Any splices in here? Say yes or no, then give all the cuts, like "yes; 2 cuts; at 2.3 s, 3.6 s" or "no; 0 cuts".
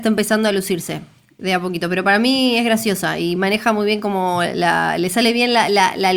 no; 0 cuts